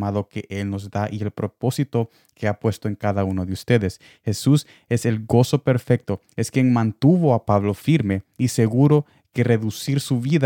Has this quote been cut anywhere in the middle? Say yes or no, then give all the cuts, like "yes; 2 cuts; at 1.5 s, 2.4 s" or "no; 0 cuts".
no; 0 cuts